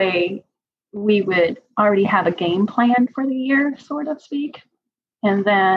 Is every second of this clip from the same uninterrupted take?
yes; 0 cuts

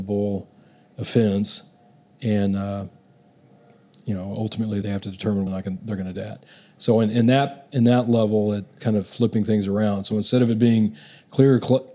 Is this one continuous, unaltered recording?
no; 4 cuts; at 4.8 s, 5.5 s, 6.1 s, 8.8 s

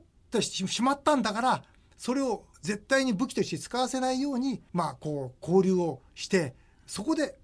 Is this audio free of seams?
no; 2 cuts; at 2.5 s, 4.7 s

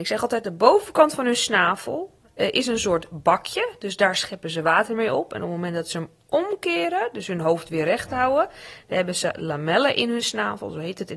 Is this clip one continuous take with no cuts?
yes; 0 cuts

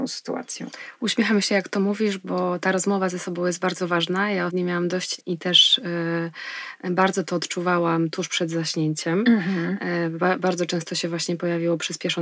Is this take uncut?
no; 2 cuts; at 4.5 s, 5.2 s

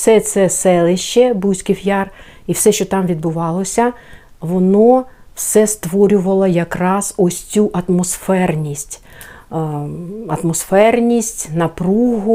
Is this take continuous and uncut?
yes; 0 cuts

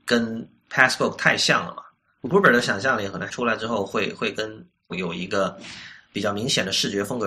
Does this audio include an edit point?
yes; 3 cuts; at 2.2 s, 3.3 s, 4.9 s

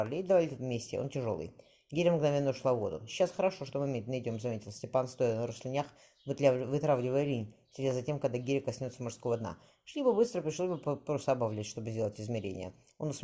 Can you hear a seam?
no; 0 cuts

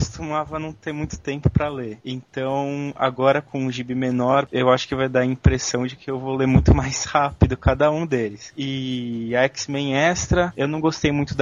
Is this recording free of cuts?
yes; 0 cuts

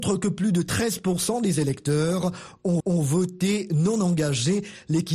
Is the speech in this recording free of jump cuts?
no; 1 cut; at 2.8 s

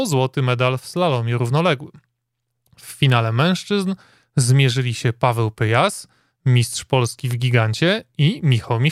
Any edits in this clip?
no; 0 cuts

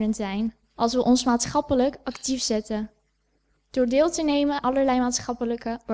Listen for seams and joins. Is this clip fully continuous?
no; 1 cut; at 4.6 s

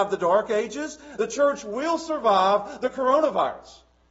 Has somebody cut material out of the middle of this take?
no; 0 cuts

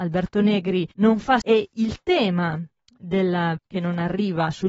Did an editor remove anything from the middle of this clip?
yes; 3 cuts; at 0.9 s, 1.4 s, 3.6 s

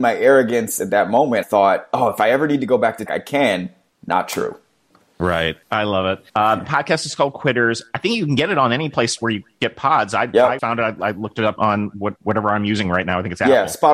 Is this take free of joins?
no; 6 cuts; at 1.4 s, 3.1 s, 5.6 s, 6.3 s, 10.6 s, 11.6 s

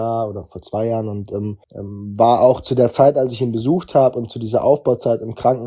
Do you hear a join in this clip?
yes; 1 cut; at 1.6 s

